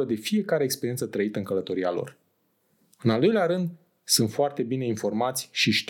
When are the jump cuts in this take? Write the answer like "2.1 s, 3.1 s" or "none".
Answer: none